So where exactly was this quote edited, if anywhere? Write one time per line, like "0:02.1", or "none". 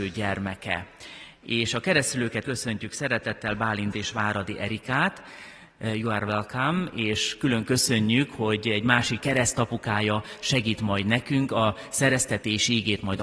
0:02.4
0:03.9
0:09.2